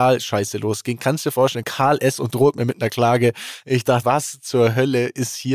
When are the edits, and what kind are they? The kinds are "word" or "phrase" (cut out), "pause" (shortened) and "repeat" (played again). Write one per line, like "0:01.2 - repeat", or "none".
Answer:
0:01.6 - word
0:04.0 - word